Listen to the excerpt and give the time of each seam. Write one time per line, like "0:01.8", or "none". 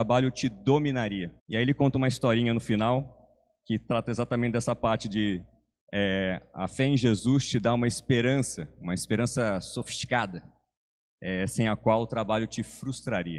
0:01.4